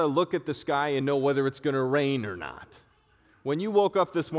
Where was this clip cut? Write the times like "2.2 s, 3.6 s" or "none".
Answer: none